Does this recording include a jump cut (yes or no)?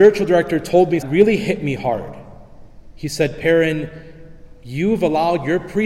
yes